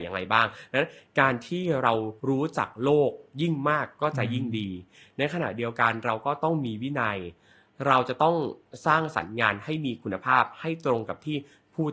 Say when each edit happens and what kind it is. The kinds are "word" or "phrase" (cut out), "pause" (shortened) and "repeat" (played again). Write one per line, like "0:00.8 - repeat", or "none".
0:02.2 - pause